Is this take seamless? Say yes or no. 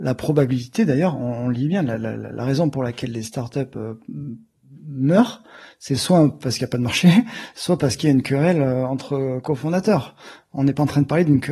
yes